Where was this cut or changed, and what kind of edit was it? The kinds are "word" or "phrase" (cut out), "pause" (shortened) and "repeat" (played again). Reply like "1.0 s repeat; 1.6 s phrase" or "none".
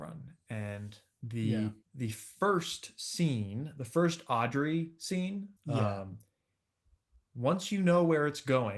1.8 s pause; 5.6 s pause